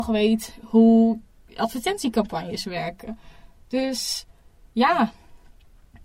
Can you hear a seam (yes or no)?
no